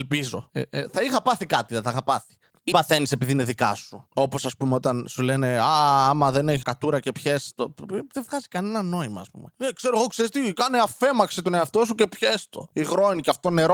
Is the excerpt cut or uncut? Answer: cut